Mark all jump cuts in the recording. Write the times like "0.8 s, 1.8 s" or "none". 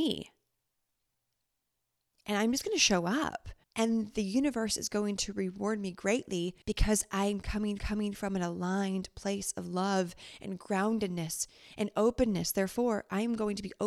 3.6 s, 6.6 s, 7.8 s